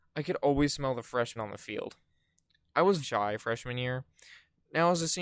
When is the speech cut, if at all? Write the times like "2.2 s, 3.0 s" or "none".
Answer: 1.4 s, 3.0 s